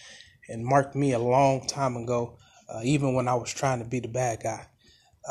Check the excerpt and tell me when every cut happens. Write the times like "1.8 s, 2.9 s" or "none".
none